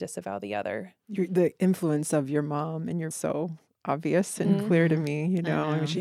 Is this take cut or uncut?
cut